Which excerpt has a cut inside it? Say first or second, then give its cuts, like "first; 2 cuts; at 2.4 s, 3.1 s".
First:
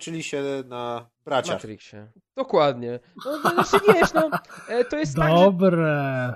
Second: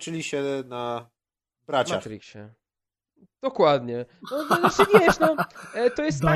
first; 2 cuts; at 1.2 s, 2.2 s